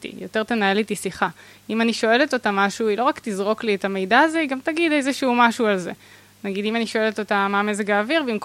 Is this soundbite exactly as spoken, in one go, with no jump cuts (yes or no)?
yes